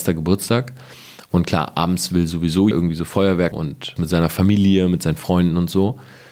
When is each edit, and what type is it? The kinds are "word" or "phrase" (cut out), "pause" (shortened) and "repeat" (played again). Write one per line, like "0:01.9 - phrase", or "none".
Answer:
0:02.7 - word
0:03.5 - word
0:04.0 - word